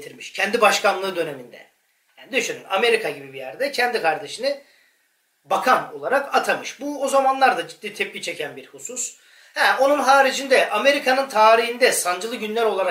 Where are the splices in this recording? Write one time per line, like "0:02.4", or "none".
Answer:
none